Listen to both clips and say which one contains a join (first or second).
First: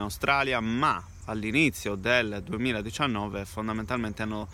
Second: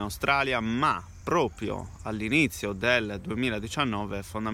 first